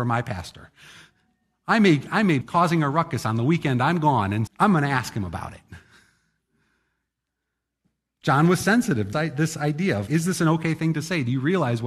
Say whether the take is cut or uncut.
cut